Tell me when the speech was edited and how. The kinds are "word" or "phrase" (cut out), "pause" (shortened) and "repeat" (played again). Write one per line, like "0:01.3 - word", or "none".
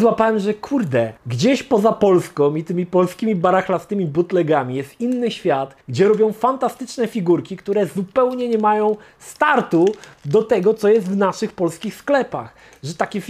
0:01.2 - pause
0:05.8 - pause